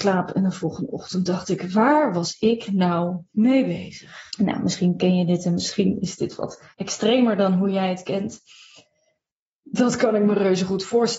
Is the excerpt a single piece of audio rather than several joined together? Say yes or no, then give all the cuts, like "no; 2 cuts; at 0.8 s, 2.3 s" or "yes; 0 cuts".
no; 2 cuts; at 4.3 s, 6.7 s